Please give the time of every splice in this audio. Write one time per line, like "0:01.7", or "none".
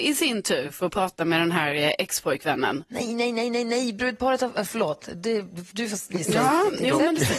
none